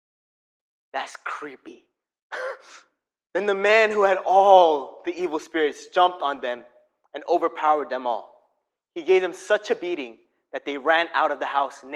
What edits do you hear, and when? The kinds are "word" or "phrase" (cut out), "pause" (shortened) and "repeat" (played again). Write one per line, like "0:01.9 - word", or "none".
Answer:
none